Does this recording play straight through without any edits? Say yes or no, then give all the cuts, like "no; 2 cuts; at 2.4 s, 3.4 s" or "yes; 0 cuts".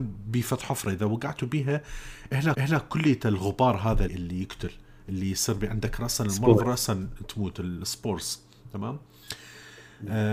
no; 2 cuts; at 2.5 s, 4.1 s